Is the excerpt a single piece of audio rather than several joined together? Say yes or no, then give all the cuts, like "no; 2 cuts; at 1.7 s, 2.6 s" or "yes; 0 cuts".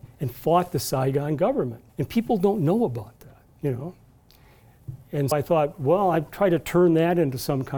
no; 3 cuts; at 1.9 s, 3.5 s, 5.3 s